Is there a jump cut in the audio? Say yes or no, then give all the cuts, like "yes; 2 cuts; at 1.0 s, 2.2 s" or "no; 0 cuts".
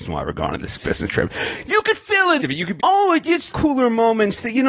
yes; 3 cuts; at 2.4 s, 2.8 s, 3.5 s